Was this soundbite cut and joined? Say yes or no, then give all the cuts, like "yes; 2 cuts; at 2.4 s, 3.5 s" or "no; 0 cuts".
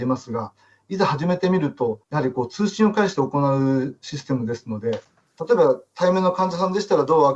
yes; 1 cut; at 2.0 s